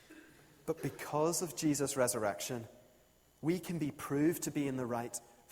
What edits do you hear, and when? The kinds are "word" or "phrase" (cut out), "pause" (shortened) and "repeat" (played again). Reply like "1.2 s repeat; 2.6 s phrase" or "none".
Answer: none

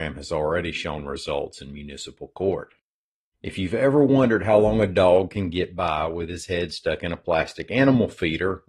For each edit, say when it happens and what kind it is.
3.1 s pause

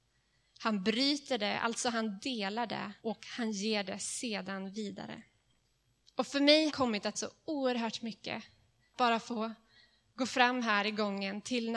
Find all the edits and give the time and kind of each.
3.0 s pause; 5.6 s pause; 6.7 s word; 7.1 s word; 8.9 s word

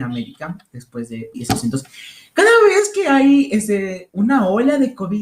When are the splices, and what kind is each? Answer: 1.3 s word; 4.1 s word

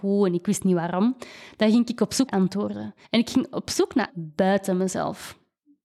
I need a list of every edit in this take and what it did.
2.3 s word; 3.0 s pause; 4.1 s word

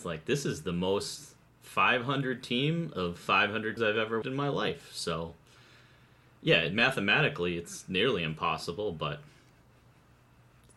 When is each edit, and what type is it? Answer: 3.8 s word; 4.2 s word

